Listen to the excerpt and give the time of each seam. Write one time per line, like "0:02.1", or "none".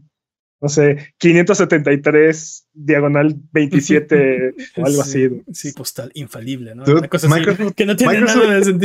0:04.8
0:05.7